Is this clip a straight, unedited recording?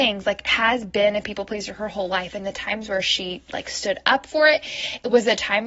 yes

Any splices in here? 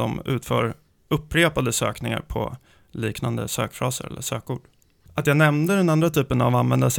no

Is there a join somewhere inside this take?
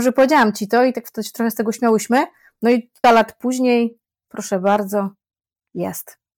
yes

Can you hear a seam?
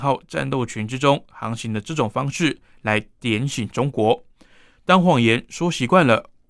no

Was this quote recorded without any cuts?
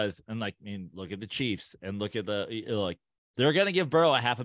yes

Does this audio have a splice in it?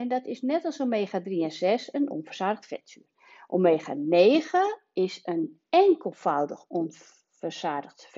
no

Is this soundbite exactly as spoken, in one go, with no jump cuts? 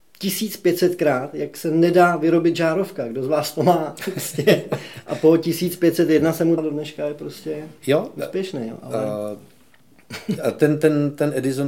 no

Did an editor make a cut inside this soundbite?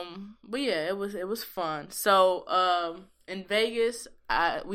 no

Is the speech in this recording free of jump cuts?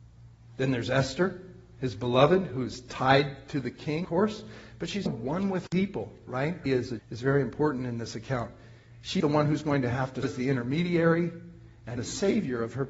no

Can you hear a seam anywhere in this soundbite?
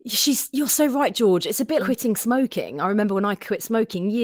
yes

